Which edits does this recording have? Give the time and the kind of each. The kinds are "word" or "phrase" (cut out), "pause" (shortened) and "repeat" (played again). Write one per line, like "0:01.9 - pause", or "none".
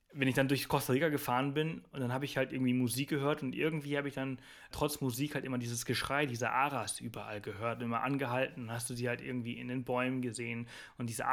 0:04.7 - word